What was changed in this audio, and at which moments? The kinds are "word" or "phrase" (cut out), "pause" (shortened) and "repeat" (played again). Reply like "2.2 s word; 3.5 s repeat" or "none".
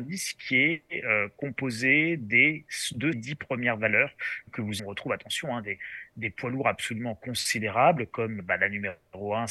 3.1 s word; 4.5 s word; 4.8 s phrase; 8.4 s word

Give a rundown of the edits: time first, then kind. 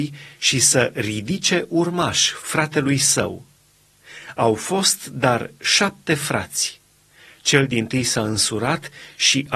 none

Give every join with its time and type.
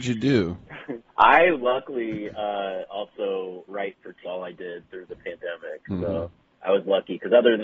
1.1 s pause; 3.7 s word; 4.2 s phrase

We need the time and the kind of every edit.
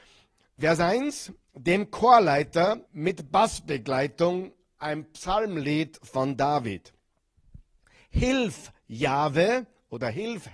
2.9 s pause

